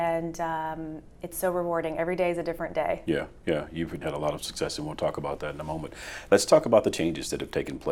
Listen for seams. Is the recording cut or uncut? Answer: cut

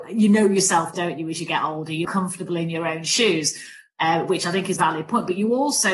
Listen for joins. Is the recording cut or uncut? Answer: cut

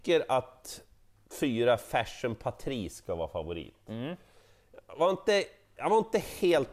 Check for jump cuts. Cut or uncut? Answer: uncut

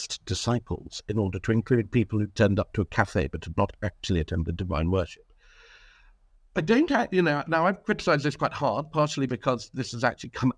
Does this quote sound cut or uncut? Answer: uncut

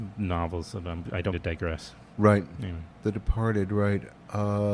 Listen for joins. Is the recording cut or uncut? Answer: cut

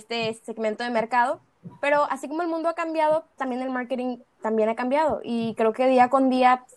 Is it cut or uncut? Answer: cut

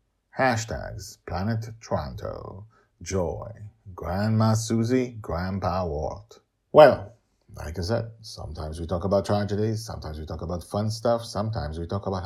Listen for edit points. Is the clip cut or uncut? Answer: uncut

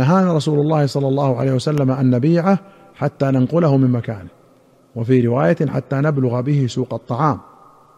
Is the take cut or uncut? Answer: uncut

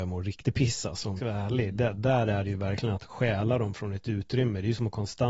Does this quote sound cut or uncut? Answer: cut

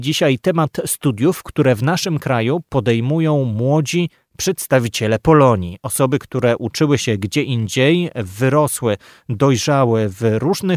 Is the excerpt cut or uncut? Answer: uncut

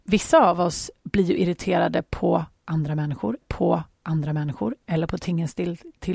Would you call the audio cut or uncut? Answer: cut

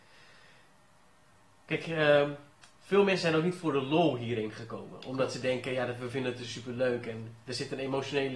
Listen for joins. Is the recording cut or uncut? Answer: cut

